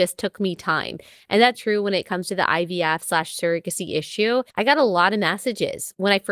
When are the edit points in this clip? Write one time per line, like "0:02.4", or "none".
0:01.5
0:04.5

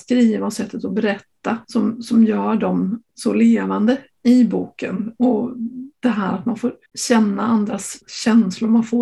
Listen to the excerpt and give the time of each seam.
0:01.6
0:03.1
0:06.9
0:08.0

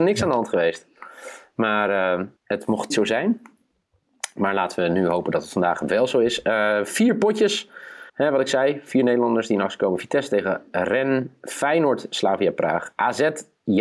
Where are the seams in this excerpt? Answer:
0:02.4
0:02.9
0:08.1

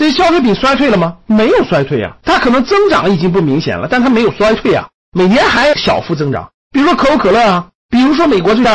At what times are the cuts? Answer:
0:01.2
0:02.2

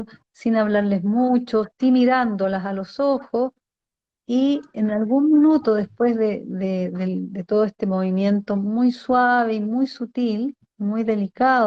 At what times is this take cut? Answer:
none

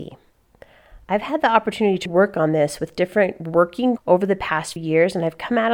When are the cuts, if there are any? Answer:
0:02.1
0:04.0
0:04.8

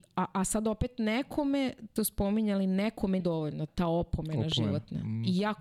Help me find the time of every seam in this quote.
0:02.0
0:03.2
0:03.7

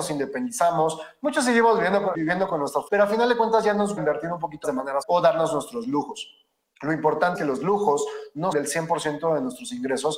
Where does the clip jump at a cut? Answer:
0:02.1
0:02.9
0:04.0
0:04.6
0:05.0
0:07.3
0:08.5

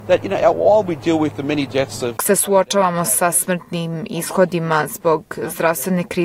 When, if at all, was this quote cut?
0:02.2

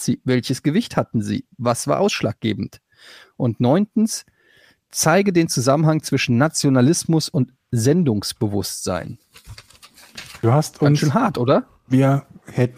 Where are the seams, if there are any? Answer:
none

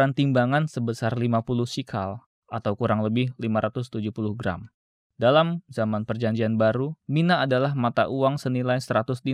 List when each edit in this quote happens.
0:07.0

